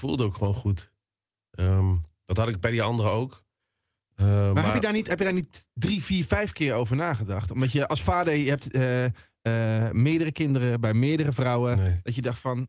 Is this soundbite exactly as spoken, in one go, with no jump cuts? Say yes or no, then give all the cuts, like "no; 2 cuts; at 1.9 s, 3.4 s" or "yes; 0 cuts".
yes; 0 cuts